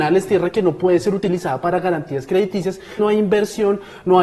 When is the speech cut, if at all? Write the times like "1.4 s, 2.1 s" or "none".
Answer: 3.0 s